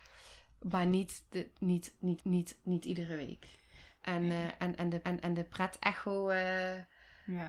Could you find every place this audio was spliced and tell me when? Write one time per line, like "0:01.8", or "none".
0:02.2
0:05.0